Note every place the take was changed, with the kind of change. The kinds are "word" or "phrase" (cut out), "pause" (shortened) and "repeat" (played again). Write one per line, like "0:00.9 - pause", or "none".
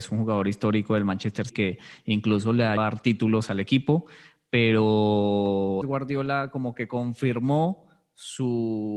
0:01.5 - word
0:02.8 - word
0:05.8 - phrase

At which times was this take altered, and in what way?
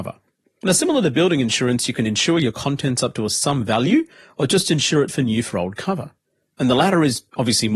none

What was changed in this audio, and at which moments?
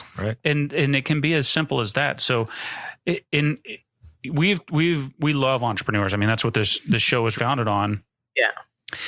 0:07.4 - word

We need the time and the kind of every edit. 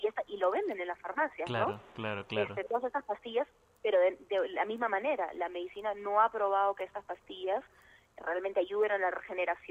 none

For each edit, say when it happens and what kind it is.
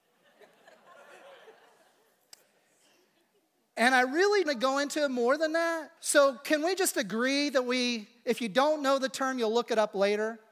0:04.5 - phrase
0:06.0 - pause

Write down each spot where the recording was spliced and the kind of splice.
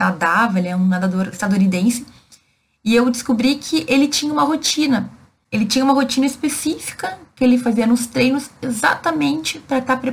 none

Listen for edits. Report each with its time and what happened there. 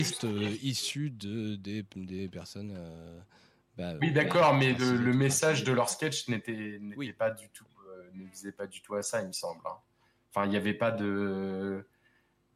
none

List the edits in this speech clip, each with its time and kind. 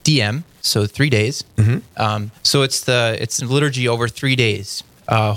0:02.4 - pause
0:03.4 - word

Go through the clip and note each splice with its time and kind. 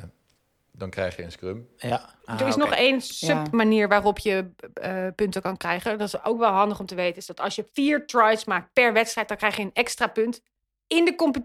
0:02.2 - pause
0:07.7 - pause

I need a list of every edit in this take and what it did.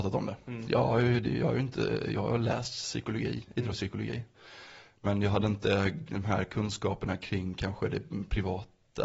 none

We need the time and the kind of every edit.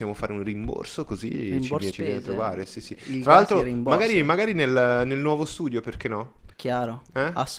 0:01.9 - word
0:06.5 - pause

